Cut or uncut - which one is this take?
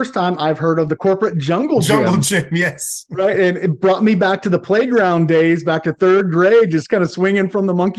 uncut